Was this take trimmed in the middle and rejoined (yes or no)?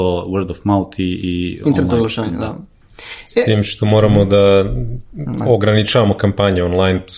no